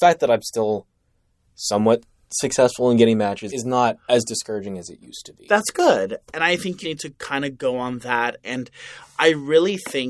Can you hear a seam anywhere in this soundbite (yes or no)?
yes